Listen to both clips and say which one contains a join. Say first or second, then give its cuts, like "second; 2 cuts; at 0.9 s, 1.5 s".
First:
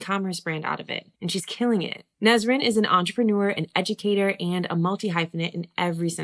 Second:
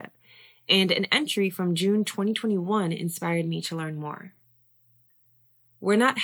first; 2 cuts; at 1.1 s, 2.1 s